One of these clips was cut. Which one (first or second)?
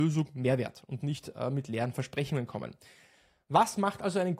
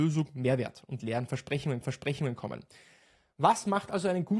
second